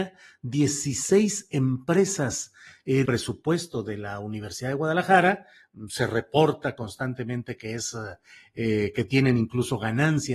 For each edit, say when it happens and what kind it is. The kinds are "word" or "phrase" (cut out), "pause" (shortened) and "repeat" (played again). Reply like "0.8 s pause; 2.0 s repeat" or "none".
3.1 s phrase